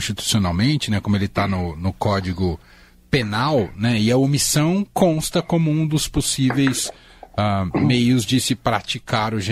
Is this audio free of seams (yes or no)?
yes